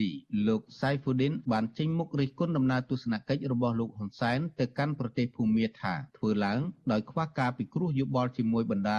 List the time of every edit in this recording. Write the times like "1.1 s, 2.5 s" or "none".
1.4 s, 6.1 s